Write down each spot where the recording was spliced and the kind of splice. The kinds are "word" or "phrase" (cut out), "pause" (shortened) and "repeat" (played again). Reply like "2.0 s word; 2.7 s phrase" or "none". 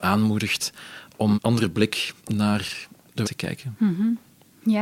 1.3 s phrase; 2.2 s pause; 3.2 s word